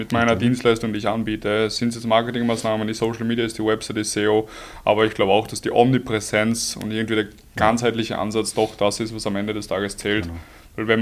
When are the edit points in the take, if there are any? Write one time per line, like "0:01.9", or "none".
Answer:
0:03.0